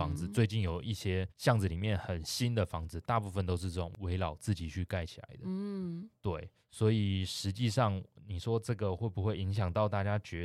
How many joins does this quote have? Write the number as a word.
one